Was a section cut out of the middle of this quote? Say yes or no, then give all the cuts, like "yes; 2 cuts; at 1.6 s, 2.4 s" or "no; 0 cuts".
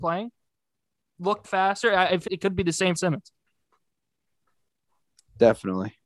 yes; 3 cuts; at 1.4 s, 2.3 s, 2.9 s